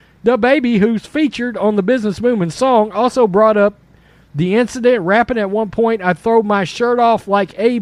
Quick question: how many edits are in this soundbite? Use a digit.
0